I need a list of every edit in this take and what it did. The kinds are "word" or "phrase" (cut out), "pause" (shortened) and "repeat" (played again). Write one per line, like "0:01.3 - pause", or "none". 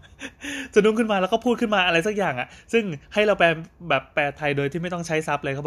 0:03.0 - pause